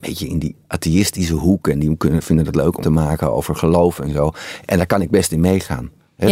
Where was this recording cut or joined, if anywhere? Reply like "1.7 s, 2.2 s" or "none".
2.8 s